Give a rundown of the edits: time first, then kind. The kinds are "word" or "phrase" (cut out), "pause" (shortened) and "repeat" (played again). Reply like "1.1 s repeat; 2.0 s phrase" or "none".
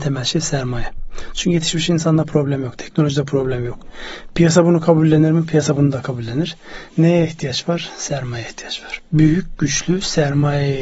6.9 s pause